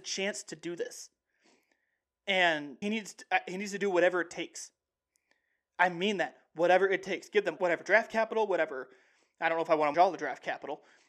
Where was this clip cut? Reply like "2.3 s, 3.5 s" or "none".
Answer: 2.8 s, 7.6 s, 9.9 s